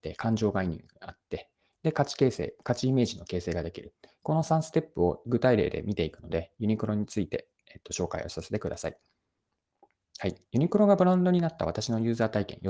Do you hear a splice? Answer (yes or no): no